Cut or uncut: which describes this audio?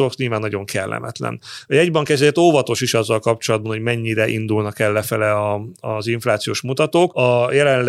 uncut